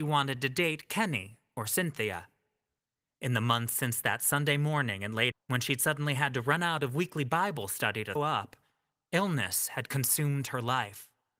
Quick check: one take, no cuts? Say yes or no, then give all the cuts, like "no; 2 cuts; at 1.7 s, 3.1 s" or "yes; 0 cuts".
no; 2 cuts; at 5.3 s, 8.2 s